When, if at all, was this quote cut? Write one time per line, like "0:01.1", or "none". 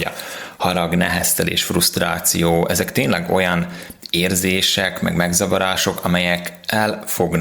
none